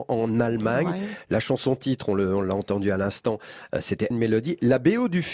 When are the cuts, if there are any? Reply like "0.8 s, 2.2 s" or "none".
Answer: 4.1 s

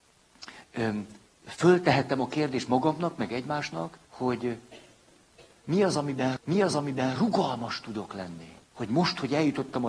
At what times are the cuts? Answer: 1.3 s, 4.0 s, 6.4 s, 8.6 s

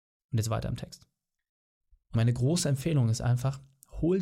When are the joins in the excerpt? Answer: 2.1 s

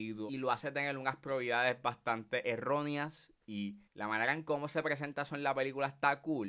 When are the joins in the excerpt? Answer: 3.9 s

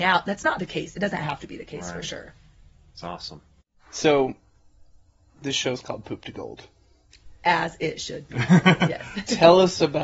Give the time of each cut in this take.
none

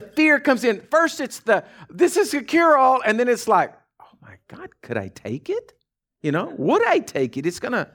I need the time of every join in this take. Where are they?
none

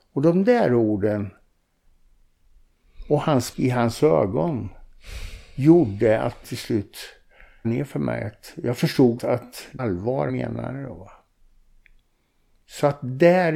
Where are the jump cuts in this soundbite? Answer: 3.5 s, 6.4 s, 7.6 s, 9.2 s, 9.8 s, 10.3 s

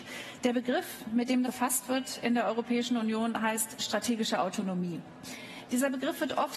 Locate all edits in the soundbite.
1.4 s

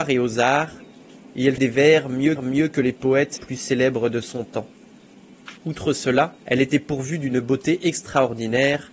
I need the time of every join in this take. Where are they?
1.6 s, 2.4 s, 3.4 s, 5.6 s, 6.4 s

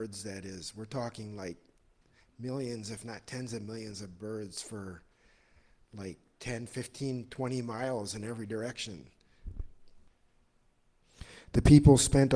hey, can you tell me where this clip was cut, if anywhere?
none

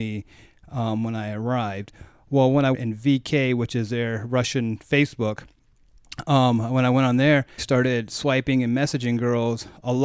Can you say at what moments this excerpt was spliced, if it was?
2.7 s, 7.6 s

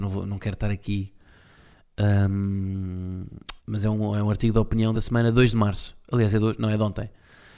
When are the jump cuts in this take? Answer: 3.6 s, 4.9 s

